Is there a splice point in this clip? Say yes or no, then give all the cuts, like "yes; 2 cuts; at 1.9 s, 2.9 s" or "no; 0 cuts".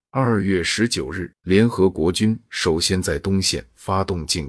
yes; 1 cut; at 1.4 s